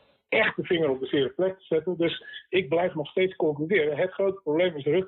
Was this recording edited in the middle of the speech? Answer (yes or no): no